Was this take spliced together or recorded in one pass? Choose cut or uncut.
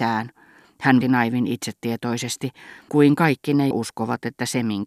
cut